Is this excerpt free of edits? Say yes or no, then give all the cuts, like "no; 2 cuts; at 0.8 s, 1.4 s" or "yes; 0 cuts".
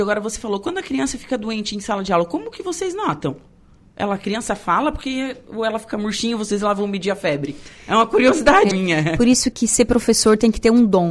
no; 2 cuts; at 8.7 s, 9.5 s